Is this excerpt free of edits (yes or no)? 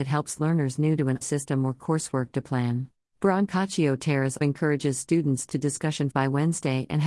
no